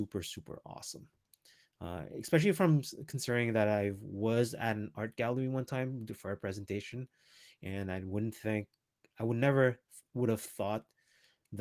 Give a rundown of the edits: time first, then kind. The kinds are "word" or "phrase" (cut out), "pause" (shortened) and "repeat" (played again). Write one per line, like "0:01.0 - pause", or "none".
none

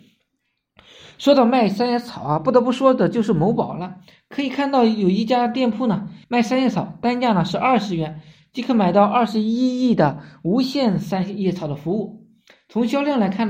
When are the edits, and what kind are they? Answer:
0:06.2 - pause

